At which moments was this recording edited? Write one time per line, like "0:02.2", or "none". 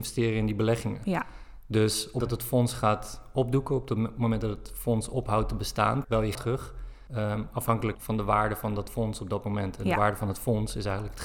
0:02.2
0:06.0
0:06.3
0:07.1
0:07.9